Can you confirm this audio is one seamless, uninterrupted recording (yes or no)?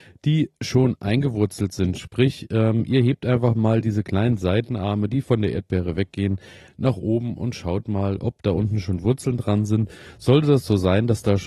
yes